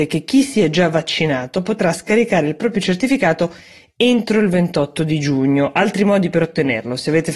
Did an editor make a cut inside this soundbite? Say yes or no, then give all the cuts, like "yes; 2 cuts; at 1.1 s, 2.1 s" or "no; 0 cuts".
no; 0 cuts